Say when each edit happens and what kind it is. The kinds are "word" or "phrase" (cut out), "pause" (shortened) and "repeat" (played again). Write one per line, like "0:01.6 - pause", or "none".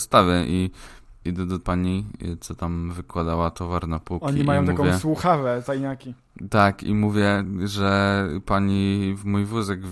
0:01.6 - word
0:05.6 - word